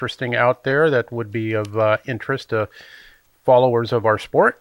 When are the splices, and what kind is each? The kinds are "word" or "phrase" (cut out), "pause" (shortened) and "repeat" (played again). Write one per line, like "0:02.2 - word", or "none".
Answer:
none

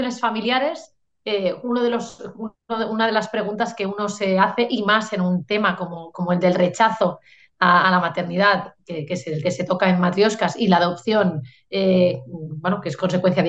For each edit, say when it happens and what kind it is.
none

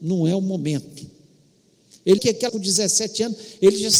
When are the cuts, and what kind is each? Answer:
0:02.2 - word
0:02.5 - word

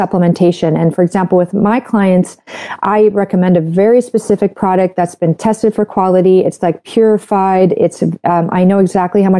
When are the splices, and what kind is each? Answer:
none

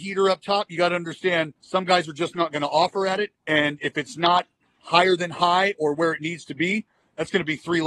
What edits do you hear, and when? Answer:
0:01.6 - pause

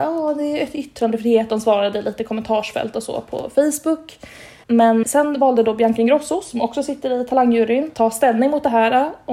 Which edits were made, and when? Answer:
0:05.0 - word
0:07.9 - word

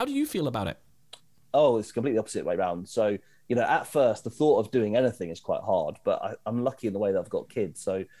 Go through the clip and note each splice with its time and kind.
none

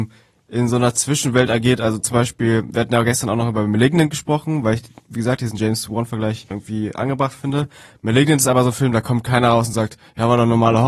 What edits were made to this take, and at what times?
0:06.5 - word

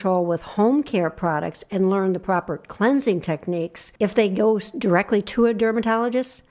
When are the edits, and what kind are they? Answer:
0:04.0 - pause

